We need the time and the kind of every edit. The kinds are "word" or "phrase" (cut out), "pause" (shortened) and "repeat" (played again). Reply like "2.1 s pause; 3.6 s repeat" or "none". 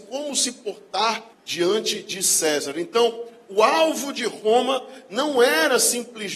1.3 s pause